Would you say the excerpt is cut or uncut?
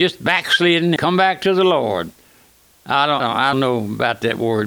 cut